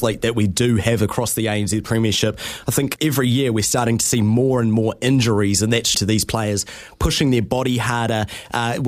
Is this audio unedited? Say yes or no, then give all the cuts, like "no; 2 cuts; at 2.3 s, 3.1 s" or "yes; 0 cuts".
no; 2 cuts; at 3.0 s, 5.9 s